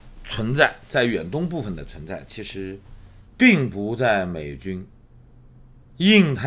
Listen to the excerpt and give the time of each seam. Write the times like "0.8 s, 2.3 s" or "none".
3.3 s